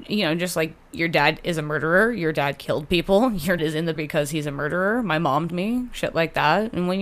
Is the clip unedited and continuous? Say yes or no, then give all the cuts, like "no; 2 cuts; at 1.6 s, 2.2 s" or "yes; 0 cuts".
no; 3 cuts; at 3.6 s, 4.0 s, 5.5 s